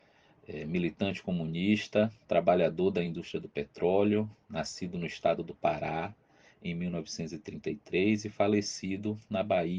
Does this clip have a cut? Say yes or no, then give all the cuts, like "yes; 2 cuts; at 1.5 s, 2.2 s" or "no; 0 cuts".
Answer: no; 0 cuts